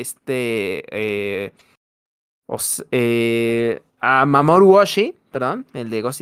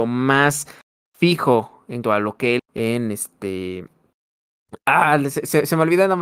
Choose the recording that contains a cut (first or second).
second